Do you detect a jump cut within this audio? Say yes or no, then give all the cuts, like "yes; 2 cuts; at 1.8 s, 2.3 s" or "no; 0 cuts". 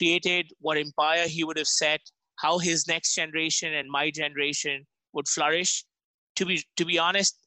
no; 0 cuts